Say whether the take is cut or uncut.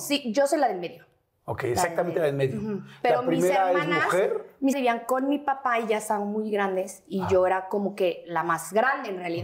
cut